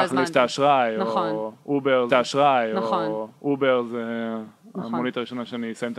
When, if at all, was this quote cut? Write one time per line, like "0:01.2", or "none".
0:02.1